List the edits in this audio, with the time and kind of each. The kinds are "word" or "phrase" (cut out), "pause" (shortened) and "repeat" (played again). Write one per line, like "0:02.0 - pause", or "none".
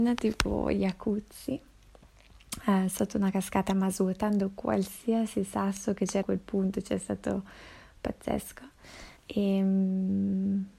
0:06.2 - phrase
0:09.2 - pause